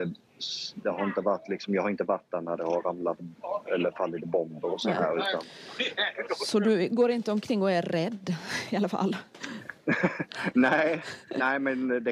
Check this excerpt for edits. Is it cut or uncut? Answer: uncut